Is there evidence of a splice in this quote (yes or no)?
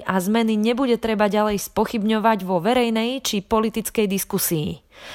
no